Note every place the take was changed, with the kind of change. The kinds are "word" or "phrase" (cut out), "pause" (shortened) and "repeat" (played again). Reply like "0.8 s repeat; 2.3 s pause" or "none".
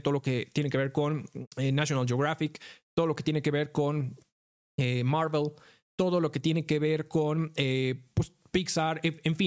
none

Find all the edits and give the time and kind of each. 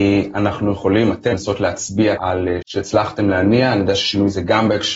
1.3 s word; 2.2 s word; 2.6 s word

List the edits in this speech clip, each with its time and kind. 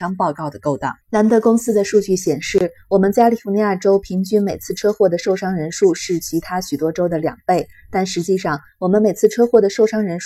1.0 s pause

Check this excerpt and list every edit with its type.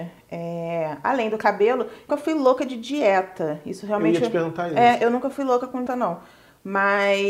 2.1 s word; 5.9 s word

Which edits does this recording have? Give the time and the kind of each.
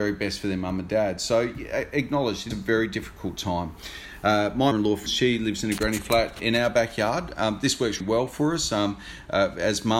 2.5 s word; 4.7 s word; 5.1 s word; 6.4 s word; 8.0 s word

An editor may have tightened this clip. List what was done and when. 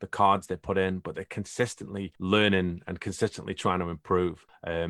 2.1 s pause

